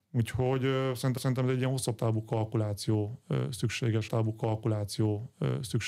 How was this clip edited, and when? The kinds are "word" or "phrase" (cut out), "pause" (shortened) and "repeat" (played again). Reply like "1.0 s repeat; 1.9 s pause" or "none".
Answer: 1.2 s repeat; 4.1 s repeat